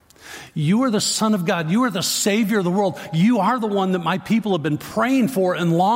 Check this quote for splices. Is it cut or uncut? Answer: uncut